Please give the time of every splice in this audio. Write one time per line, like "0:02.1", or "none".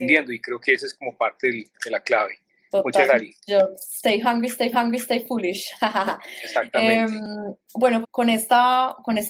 0:01.7
0:02.5
0:03.1
0:04.7
0:08.0

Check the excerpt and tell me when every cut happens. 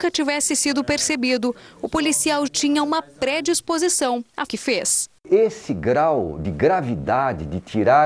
0:02.5
0:04.5
0:05.2

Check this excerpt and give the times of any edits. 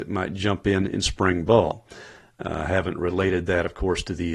none

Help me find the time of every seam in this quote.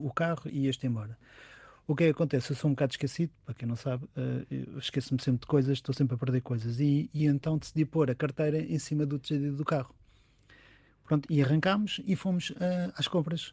none

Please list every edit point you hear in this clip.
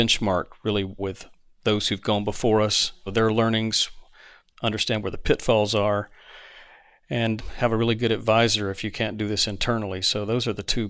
0:01.0
0:03.1

